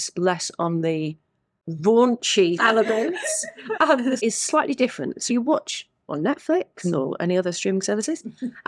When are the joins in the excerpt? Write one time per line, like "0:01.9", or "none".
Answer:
0:03.7
0:04.2
0:05.3
0:06.1